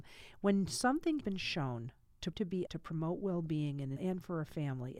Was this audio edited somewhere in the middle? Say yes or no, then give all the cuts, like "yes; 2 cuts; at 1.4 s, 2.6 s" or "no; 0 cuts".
yes; 4 cuts; at 1.2 s, 2.3 s, 2.7 s, 4.0 s